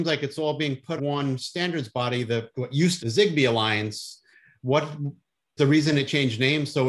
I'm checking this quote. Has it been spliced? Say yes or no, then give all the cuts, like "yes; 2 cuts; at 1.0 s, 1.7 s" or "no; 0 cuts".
yes; 4 cuts; at 1.0 s, 2.5 s, 3.0 s, 5.6 s